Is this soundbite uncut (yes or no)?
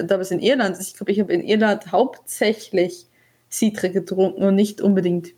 yes